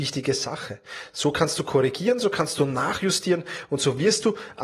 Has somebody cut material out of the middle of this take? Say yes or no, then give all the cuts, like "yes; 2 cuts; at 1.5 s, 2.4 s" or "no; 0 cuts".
no; 0 cuts